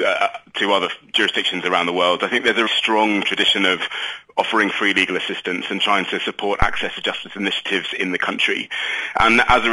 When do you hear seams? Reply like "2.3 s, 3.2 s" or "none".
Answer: 2.7 s